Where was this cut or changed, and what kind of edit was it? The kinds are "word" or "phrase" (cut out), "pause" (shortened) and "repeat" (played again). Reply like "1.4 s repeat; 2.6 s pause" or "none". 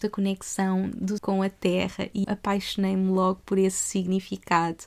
1.2 s word; 2.2 s word